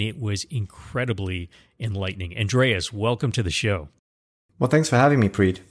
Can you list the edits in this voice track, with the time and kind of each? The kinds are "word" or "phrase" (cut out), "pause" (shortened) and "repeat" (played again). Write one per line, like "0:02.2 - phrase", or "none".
none